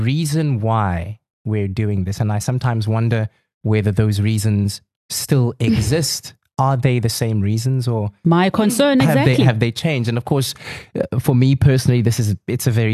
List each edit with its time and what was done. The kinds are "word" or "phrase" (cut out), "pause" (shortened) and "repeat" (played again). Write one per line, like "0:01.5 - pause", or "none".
none